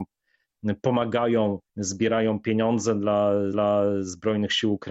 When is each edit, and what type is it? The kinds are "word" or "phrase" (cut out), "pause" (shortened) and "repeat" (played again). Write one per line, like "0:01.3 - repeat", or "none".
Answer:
0:01.7 - pause
0:03.5 - repeat